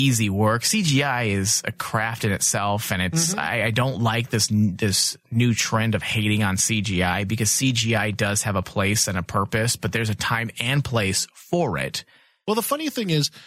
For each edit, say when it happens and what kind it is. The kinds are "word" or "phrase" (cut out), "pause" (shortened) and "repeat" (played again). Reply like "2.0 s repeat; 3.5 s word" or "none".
none